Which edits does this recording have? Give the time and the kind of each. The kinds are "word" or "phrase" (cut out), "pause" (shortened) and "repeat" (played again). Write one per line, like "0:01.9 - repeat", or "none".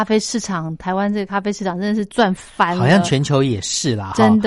none